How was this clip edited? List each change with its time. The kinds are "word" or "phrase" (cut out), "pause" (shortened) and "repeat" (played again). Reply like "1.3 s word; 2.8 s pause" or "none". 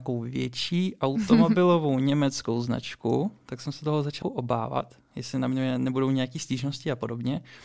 4.2 s word